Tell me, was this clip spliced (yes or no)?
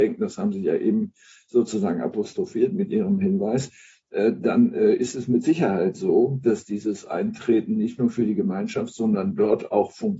no